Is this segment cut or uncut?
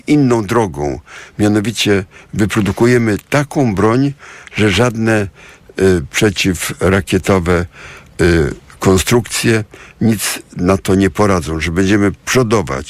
uncut